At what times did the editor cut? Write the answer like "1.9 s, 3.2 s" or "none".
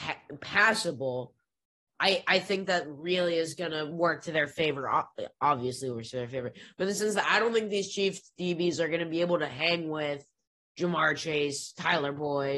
none